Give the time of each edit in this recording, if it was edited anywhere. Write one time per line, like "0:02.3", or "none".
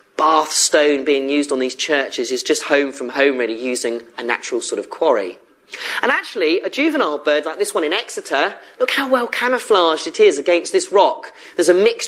none